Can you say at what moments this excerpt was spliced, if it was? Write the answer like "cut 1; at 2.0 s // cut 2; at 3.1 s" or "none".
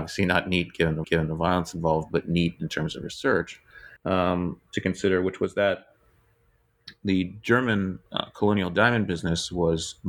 cut 1; at 1.0 s // cut 2; at 4.0 s // cut 3; at 8.1 s